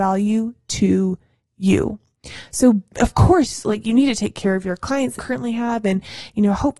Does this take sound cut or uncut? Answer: cut